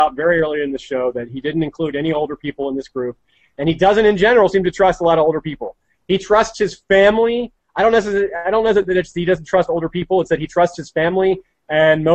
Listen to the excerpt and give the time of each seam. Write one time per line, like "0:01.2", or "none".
none